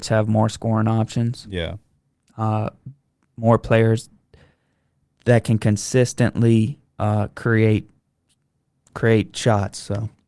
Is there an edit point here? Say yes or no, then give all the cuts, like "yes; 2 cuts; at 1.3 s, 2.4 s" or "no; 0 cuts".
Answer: no; 0 cuts